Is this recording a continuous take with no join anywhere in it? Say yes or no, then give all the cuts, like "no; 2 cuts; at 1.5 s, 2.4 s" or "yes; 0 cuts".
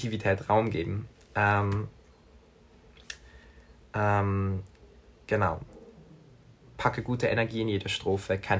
yes; 0 cuts